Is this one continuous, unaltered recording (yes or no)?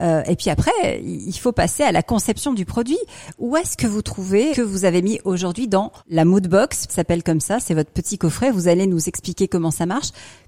no